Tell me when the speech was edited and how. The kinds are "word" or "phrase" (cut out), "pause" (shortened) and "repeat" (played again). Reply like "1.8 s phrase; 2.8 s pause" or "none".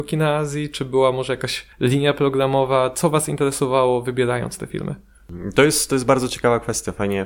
1.7 s pause